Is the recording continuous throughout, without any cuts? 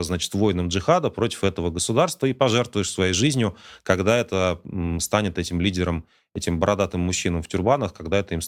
yes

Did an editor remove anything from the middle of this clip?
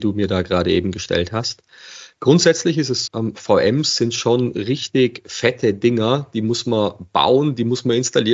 yes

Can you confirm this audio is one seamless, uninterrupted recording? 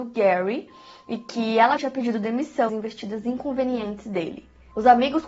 no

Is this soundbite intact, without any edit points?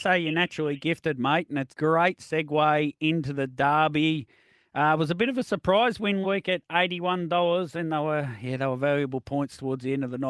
no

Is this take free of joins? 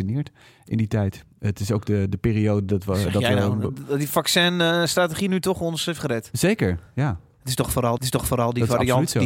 no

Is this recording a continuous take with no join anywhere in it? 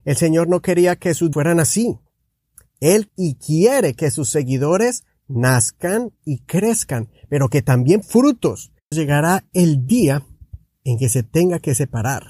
no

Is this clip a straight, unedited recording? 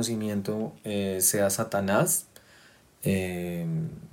yes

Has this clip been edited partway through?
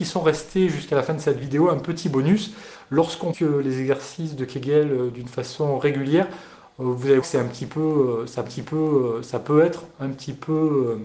yes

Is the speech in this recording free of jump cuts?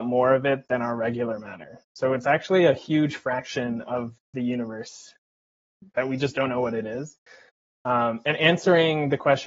yes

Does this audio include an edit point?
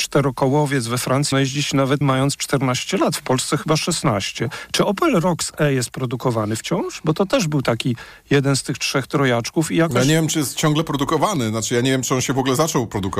yes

